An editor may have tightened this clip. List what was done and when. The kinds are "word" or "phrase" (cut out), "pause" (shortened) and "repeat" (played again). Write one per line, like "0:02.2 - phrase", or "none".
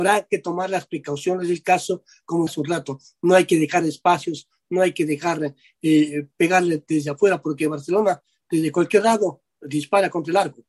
0:02.5 - word